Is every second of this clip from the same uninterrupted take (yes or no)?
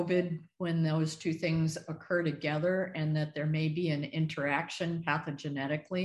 yes